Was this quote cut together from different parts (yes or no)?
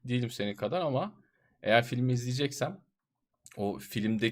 no